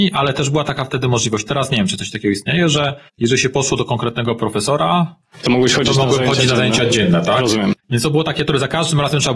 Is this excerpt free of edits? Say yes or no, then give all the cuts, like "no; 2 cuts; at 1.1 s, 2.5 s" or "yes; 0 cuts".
no; 2 cuts; at 3.1 s, 7.8 s